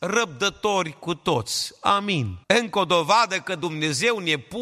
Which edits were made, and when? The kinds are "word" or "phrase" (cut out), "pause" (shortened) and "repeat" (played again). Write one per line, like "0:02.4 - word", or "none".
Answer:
0:02.4 - pause